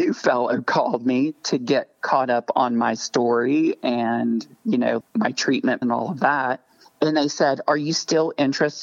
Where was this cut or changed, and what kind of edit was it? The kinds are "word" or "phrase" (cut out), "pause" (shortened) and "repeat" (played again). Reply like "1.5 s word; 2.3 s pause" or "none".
5.0 s word; 5.8 s word